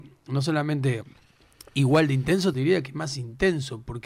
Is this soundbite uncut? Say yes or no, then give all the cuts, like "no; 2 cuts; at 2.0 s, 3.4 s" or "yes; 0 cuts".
no; 1 cut; at 2.5 s